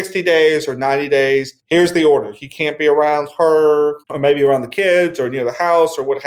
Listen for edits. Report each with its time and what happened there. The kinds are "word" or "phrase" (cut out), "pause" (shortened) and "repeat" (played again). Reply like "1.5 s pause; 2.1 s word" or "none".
4.0 s word